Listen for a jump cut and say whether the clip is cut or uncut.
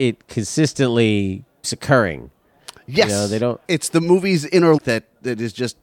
cut